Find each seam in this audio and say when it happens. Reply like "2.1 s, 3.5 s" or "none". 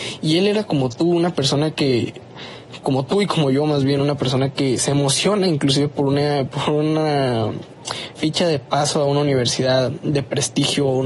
none